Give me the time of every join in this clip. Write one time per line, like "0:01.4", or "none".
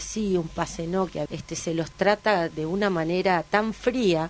0:01.3
0:02.5